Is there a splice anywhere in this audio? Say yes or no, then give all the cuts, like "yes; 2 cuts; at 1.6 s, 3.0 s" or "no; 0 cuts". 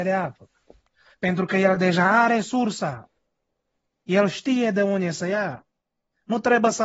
no; 0 cuts